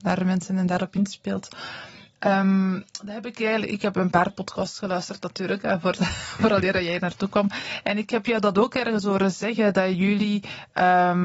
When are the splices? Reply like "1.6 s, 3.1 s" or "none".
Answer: none